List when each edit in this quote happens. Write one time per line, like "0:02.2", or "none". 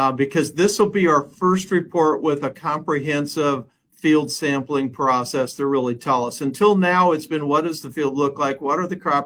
none